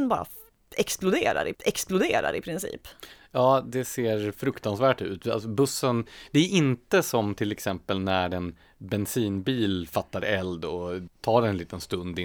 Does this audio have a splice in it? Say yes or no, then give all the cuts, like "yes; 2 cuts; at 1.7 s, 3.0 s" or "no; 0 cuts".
yes; 2 cuts; at 1.5 s, 11.1 s